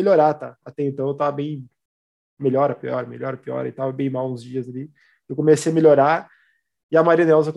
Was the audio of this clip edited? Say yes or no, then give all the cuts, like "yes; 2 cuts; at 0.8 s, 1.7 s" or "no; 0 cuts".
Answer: no; 0 cuts